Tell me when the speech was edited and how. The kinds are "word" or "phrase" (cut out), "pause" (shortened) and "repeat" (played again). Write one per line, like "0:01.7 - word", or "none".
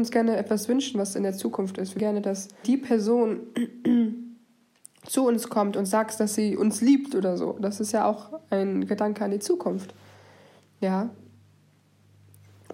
0:02.0 - word
0:02.6 - word